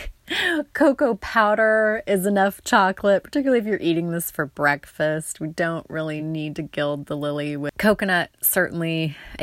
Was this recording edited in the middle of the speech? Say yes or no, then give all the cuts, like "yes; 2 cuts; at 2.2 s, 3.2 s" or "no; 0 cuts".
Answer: no; 0 cuts